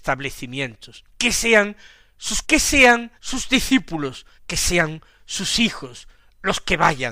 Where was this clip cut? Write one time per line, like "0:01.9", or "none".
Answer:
0:01.1
0:02.4
0:03.2
0:04.4

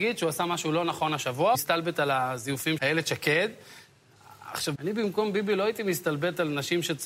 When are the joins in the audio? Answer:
0:01.5
0:02.8
0:04.8

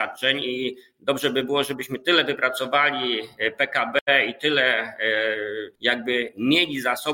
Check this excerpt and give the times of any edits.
0:05.7

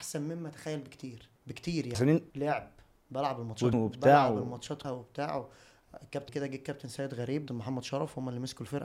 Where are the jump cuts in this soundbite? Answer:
0:01.4
0:01.9
0:02.3
0:03.7
0:04.8
0:06.3
0:07.5

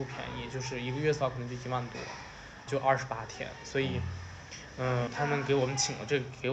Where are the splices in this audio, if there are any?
0:02.7
0:05.1

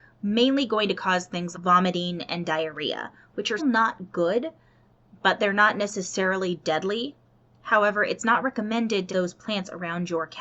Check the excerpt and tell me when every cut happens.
0:01.5
0:03.6
0:09.1

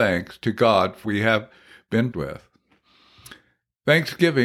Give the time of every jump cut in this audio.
0:01.0
0:02.1

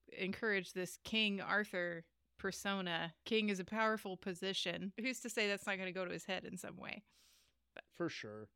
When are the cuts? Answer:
0:03.2

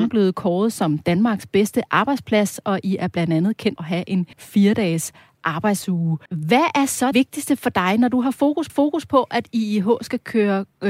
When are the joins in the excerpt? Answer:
0:03.8
0:04.3
0:06.3
0:07.1
0:08.7

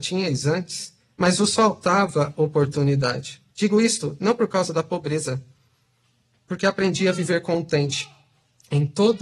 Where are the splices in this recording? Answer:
0:03.5

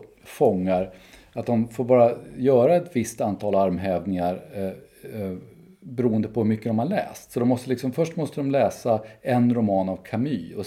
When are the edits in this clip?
none

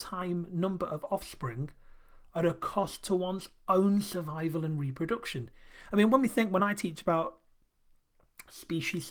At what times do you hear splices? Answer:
none

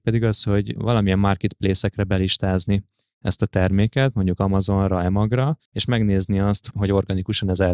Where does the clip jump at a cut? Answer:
0:05.7

